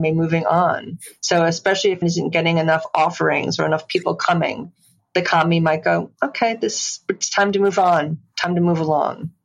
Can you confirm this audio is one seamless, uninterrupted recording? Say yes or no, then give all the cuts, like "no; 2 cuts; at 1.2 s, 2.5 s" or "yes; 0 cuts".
no; 1 cut; at 2.0 s